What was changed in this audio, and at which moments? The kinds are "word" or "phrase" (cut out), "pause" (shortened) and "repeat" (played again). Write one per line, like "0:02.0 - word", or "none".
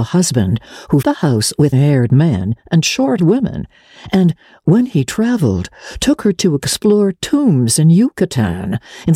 0:01.0 - word
0:01.7 - word
0:03.2 - word